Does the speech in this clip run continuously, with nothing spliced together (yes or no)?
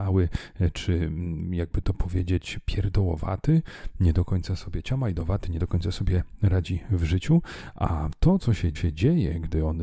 no